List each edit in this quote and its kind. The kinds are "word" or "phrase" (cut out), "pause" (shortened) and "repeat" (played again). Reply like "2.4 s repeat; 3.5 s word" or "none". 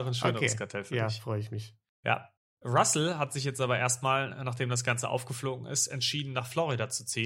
none